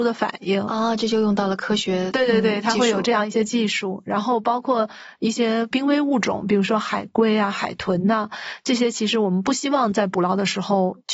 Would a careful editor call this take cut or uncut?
uncut